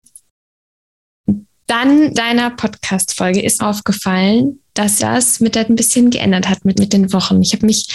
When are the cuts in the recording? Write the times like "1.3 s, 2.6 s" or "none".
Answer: 2.1 s, 3.6 s, 5.0 s, 5.7 s, 6.8 s